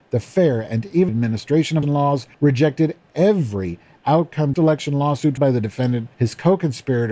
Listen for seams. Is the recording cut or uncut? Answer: cut